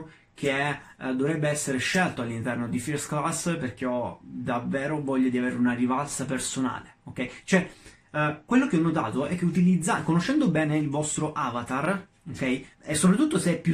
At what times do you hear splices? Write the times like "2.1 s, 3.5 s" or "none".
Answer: 12.7 s

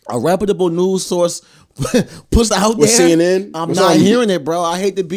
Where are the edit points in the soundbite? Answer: 2.5 s

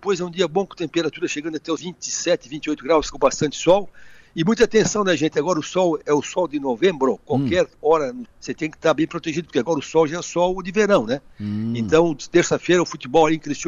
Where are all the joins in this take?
1.8 s, 3.1 s, 6.0 s, 8.3 s

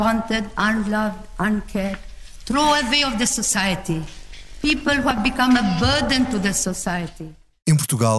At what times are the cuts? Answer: none

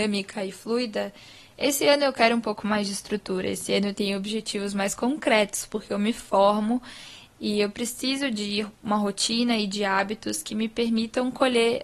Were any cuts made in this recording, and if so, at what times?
none

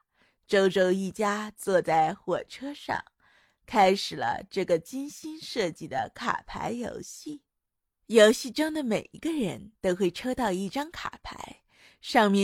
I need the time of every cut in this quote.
none

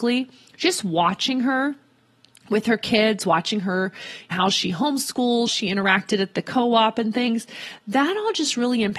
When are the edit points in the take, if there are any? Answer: 4.3 s, 5.5 s

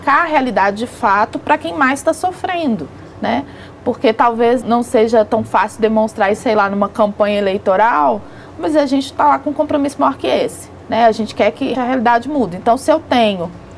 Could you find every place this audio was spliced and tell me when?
4.6 s, 11.7 s

